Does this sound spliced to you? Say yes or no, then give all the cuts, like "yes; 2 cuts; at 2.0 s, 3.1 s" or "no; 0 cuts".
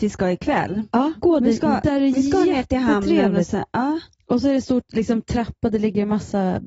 no; 0 cuts